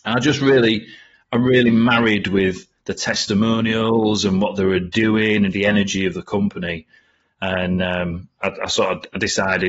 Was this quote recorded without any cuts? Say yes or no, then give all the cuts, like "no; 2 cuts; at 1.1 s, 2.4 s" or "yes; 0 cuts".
no; 1 cut; at 5.5 s